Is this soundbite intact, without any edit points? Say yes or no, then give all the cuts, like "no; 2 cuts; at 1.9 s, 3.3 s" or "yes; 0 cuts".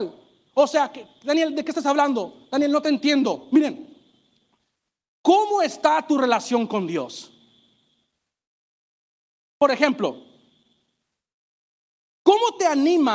yes; 0 cuts